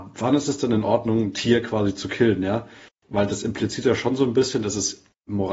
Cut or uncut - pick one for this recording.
uncut